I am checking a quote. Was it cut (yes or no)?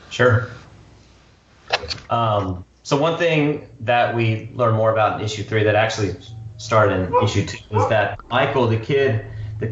yes